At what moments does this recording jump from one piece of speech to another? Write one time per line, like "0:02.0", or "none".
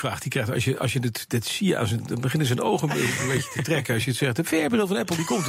none